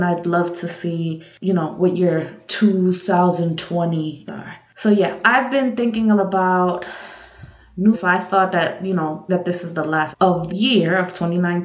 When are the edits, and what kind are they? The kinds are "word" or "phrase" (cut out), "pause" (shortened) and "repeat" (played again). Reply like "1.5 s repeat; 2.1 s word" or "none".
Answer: 4.3 s word; 5.2 s word; 6.2 s word; 7.9 s word; 9.3 s word; 10.1 s word; 10.5 s word